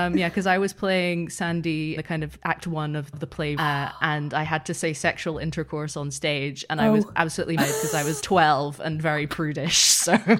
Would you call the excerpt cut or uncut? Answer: cut